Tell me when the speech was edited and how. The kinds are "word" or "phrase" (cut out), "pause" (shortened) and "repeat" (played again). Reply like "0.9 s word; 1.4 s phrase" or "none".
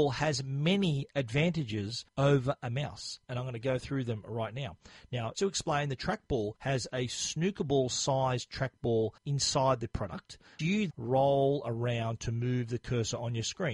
2.1 s pause; 5.3 s word; 6.6 s pause; 9.2 s pause; 10.6 s word; 10.9 s word